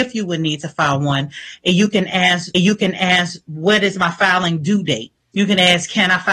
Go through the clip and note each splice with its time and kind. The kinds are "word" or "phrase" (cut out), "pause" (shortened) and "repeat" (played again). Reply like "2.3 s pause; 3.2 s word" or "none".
2.5 s repeat; 5.2 s pause